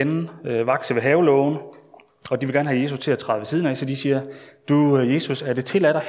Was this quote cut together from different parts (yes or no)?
no